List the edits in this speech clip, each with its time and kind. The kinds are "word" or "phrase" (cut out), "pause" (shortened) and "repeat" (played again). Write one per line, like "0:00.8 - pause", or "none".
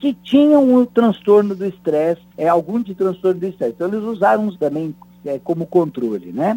0:02.3 - pause
0:02.8 - word
0:04.5 - word